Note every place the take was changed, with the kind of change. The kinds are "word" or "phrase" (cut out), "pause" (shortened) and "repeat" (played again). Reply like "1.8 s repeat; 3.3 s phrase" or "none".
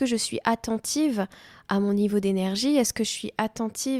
none